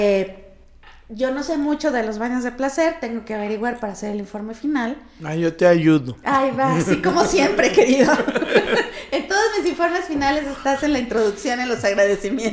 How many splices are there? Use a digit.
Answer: 0